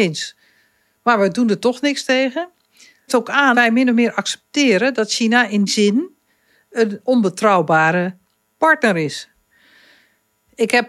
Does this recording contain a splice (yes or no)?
yes